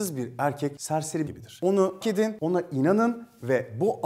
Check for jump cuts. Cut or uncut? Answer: cut